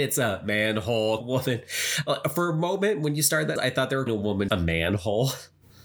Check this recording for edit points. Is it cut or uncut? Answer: cut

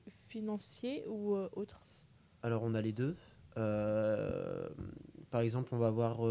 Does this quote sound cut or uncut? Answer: uncut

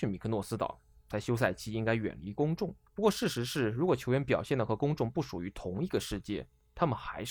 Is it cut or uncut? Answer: cut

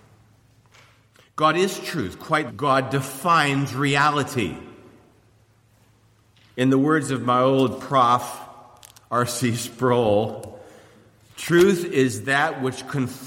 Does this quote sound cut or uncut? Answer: cut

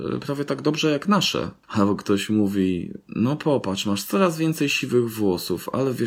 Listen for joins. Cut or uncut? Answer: uncut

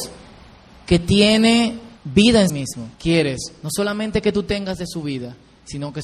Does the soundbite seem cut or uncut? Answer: cut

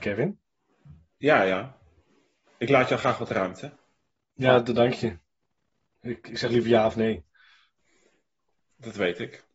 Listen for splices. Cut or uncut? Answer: uncut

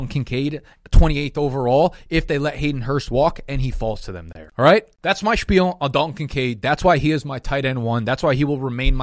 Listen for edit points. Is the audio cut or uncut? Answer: uncut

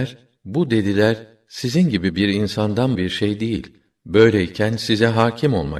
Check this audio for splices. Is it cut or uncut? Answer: cut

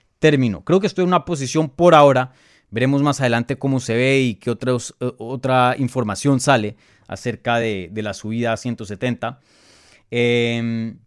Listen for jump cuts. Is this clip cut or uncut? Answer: uncut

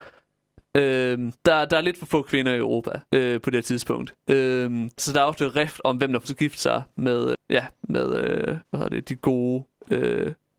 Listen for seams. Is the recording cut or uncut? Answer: cut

